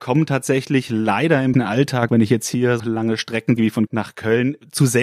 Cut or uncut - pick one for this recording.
cut